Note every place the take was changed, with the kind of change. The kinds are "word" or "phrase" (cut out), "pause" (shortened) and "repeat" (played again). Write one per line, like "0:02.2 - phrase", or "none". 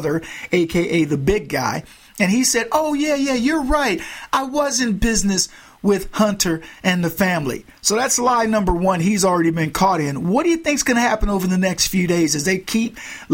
none